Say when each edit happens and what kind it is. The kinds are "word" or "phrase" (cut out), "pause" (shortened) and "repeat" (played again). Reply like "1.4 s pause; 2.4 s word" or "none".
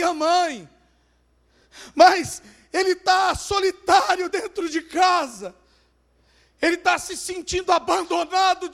none